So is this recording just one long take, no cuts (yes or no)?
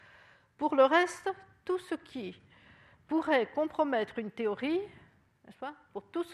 yes